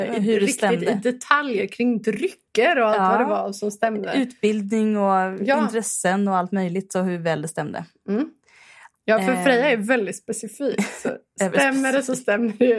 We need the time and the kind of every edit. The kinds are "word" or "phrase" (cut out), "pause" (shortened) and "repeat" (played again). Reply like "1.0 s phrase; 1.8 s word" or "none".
2.5 s pause